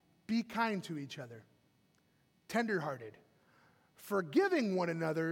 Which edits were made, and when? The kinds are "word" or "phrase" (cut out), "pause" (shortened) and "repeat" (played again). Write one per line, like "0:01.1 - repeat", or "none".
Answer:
none